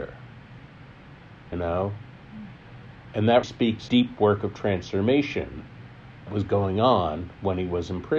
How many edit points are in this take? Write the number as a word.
four